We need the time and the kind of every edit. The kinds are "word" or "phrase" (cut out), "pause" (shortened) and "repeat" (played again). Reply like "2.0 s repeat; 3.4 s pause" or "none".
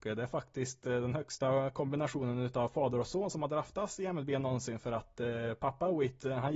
none